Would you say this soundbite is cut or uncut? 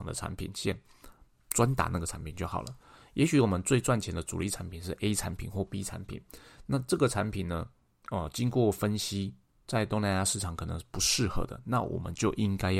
uncut